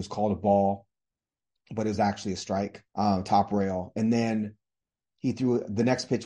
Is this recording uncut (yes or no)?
no